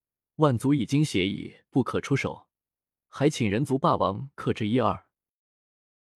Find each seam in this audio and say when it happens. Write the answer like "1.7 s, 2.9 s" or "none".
none